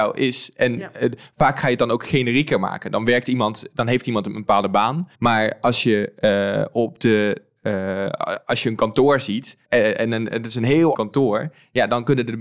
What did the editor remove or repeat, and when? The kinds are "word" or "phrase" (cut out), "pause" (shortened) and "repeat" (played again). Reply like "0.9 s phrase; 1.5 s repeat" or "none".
5.1 s pause; 9.7 s pause; 10.9 s word